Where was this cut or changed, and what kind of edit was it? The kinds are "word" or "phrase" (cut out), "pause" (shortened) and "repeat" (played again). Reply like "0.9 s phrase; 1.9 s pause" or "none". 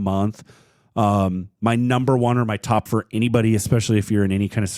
2.9 s word